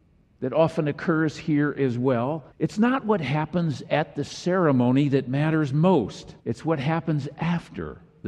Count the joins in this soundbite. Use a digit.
2